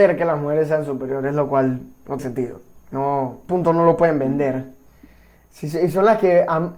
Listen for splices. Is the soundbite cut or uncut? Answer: cut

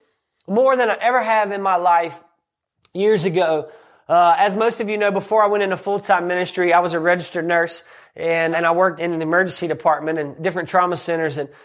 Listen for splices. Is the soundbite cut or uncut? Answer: cut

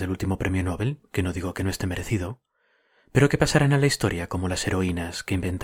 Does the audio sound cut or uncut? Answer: uncut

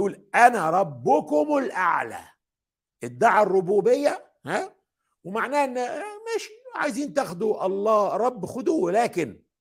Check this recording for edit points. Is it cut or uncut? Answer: uncut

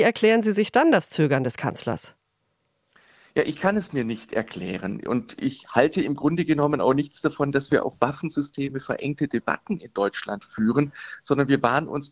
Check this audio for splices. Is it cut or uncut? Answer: uncut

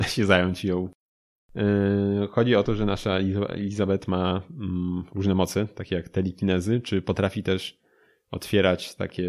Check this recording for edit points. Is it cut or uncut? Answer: uncut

